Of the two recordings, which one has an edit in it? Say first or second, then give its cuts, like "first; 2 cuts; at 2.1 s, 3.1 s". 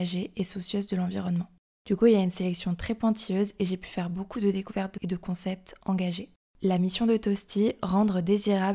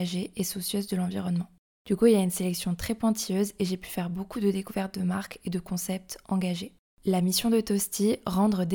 first; 1 cut; at 5.0 s